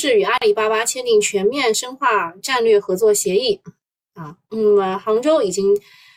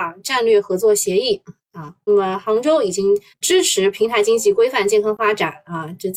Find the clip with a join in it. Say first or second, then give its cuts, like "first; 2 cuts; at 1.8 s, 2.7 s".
second; 3 cuts; at 1.6 s, 2.1 s, 3.3 s